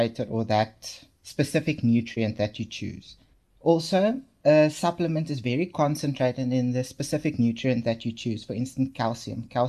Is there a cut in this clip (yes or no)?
yes